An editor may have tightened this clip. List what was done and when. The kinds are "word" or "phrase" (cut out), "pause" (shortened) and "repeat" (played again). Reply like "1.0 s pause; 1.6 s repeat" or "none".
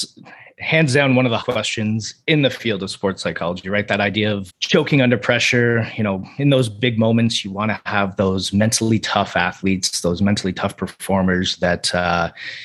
1.4 s word; 4.5 s word